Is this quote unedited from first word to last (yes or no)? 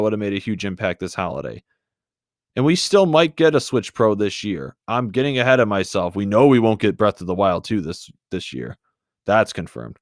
yes